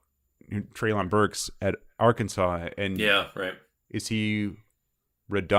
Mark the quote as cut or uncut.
uncut